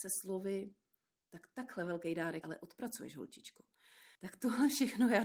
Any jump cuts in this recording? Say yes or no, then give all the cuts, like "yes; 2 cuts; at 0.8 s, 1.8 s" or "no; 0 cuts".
yes; 2 cuts; at 2.4 s, 4.1 s